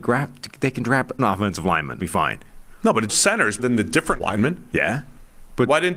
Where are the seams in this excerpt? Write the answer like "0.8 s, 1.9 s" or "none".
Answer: 1.2 s, 2.0 s, 3.1 s, 3.6 s, 4.2 s